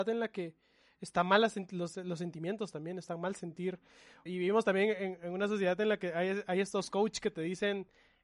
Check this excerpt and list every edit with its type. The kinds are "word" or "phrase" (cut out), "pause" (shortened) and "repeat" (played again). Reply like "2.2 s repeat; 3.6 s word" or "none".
none